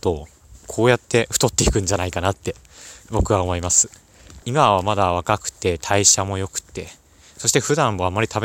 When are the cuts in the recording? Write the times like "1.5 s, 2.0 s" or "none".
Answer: 4.4 s